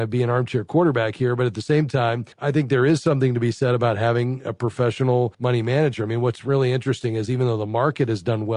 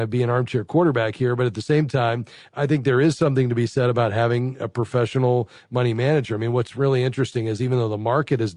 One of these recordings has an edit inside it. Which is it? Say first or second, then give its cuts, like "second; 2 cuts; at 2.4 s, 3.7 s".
first; 2 cuts; at 2.3 s, 5.3 s